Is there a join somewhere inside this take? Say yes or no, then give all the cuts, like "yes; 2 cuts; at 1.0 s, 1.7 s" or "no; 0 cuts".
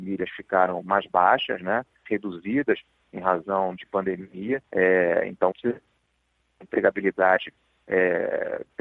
yes; 3 cuts; at 3.8 s, 4.7 s, 5.5 s